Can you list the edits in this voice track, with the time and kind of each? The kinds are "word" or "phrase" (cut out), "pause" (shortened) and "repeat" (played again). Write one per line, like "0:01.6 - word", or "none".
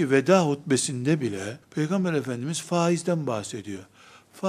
0:01.6 - pause